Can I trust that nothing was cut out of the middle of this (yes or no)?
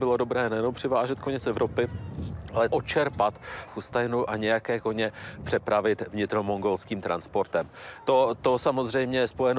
no